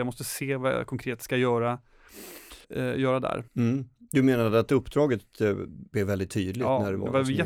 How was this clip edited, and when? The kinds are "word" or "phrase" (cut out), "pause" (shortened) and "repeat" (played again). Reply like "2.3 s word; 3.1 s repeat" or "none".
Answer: 2.6 s pause; 3.5 s pause; 5.9 s word